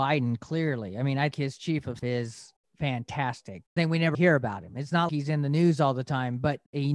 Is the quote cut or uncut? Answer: cut